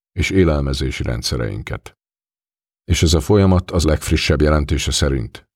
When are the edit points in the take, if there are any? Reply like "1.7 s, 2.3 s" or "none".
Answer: 3.8 s